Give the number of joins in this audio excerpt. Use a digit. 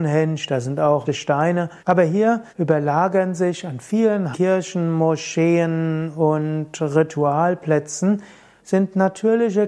5